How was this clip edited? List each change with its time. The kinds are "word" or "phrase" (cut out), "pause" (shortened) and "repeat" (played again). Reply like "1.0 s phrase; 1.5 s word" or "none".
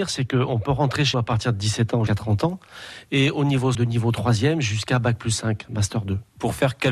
1.1 s word; 2.1 s word; 3.7 s word